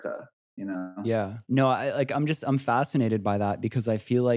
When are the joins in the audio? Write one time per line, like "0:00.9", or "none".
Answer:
0:01.4